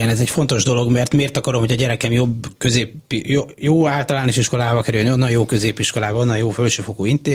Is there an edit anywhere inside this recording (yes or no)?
no